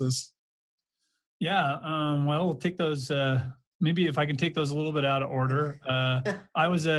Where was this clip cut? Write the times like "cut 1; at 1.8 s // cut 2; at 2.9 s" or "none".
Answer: none